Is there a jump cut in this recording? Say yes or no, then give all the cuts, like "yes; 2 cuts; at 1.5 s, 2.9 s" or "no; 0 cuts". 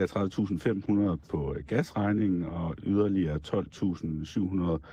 no; 0 cuts